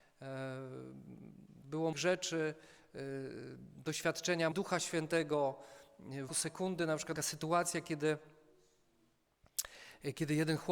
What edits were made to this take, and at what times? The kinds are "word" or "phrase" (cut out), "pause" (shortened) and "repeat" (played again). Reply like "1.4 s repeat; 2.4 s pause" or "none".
1.9 s phrase; 4.5 s word; 6.3 s word; 7.2 s phrase